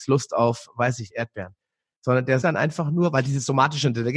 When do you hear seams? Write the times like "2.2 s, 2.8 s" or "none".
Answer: 1.1 s, 2.4 s

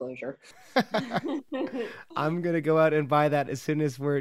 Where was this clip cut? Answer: 2.1 s

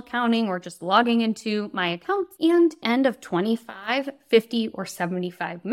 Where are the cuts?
2.8 s

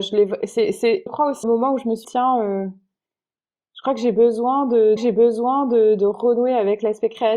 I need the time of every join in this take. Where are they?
1.1 s, 1.4 s, 2.0 s, 5.0 s

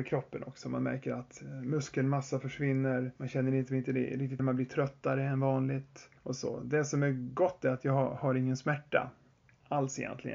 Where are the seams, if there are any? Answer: 3.2 s, 4.4 s, 6.2 s

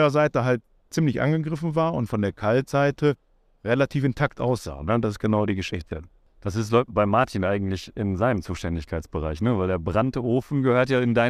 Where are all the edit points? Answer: none

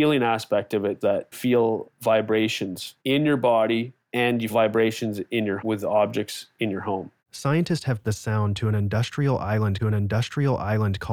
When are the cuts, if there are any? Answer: 1.0 s, 1.3 s, 3.0 s, 4.0 s, 4.5 s, 5.6 s, 7.2 s, 8.0 s, 9.8 s

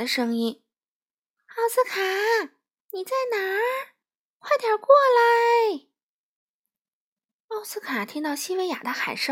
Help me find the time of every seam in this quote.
none

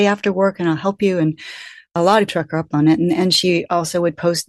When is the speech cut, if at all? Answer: 2.3 s

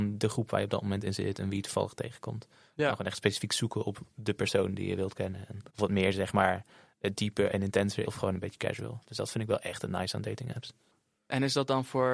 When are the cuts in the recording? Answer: 5.7 s, 8.1 s

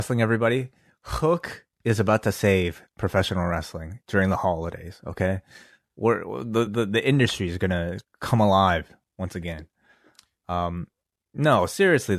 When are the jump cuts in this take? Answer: 6.7 s

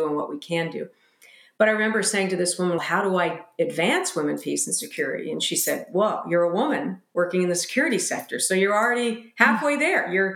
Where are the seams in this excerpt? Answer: 2.8 s

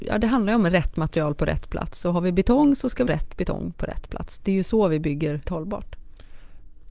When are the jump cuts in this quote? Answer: 3.1 s, 5.4 s

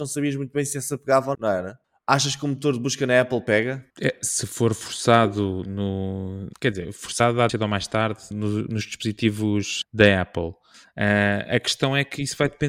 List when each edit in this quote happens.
1.3 s, 3.9 s, 6.6 s, 7.5 s, 8.3 s, 9.8 s

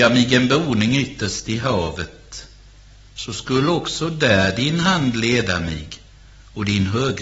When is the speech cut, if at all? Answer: none

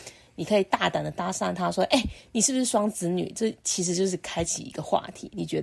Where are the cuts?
none

